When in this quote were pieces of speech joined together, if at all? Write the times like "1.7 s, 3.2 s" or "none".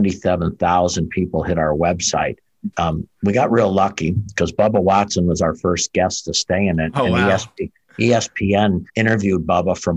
2.7 s, 8.9 s